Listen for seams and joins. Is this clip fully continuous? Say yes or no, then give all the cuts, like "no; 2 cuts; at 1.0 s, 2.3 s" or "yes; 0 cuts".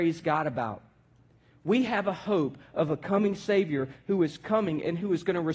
yes; 0 cuts